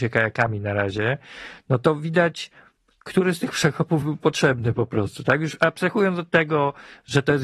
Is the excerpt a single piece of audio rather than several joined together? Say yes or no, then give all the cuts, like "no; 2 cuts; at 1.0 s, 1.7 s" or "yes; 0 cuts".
yes; 0 cuts